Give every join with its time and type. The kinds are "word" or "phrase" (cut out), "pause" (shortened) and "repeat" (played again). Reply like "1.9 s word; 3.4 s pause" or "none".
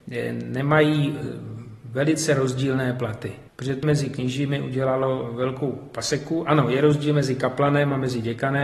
3.5 s pause; 3.8 s word